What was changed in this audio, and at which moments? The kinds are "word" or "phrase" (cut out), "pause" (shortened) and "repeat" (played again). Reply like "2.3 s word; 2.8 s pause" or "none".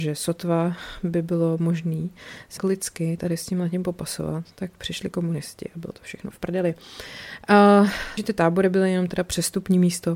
2.6 s word; 6.3 s word; 8.2 s word